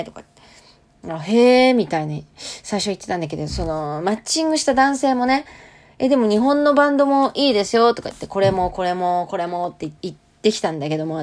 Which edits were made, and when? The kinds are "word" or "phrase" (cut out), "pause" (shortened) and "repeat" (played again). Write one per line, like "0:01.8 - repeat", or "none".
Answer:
0:10.0 - pause